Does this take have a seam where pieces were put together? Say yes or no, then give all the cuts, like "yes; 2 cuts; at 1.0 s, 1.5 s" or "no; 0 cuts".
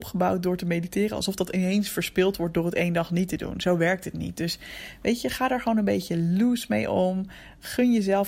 no; 0 cuts